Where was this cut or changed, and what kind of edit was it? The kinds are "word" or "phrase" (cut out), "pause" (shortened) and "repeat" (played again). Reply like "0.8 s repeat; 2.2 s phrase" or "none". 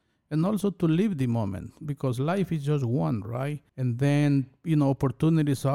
3.7 s pause